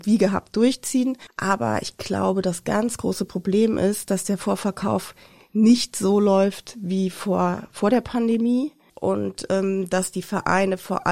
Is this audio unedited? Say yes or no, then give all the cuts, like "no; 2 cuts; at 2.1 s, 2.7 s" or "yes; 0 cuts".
yes; 0 cuts